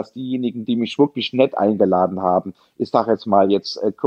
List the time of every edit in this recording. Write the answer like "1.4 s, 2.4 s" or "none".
none